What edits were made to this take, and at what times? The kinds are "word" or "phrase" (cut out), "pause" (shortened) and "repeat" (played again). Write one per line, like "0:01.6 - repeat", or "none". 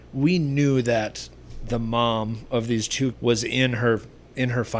0:03.1 - word